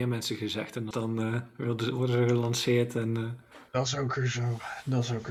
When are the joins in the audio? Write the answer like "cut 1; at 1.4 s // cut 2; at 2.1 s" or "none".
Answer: cut 1; at 0.9 s // cut 2; at 3.7 s